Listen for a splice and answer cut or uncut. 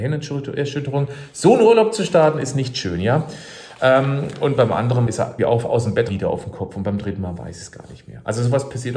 cut